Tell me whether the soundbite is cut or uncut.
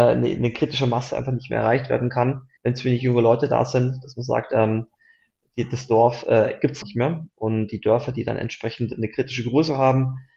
cut